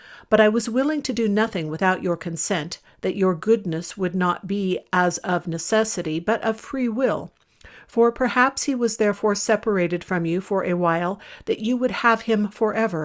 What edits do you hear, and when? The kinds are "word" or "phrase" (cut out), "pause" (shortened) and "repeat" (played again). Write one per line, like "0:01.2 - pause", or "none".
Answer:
none